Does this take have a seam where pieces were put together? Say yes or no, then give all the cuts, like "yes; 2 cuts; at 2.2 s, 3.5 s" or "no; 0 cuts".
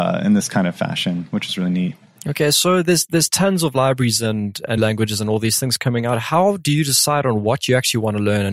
yes; 2 cuts; at 2.1 s, 4.8 s